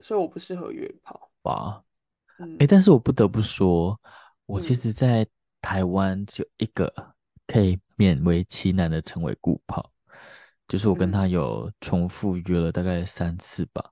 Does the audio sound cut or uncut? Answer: uncut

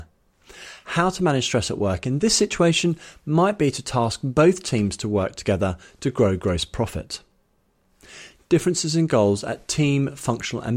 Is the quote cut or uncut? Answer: uncut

